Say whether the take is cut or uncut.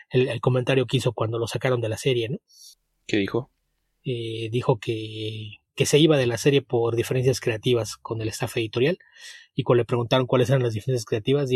uncut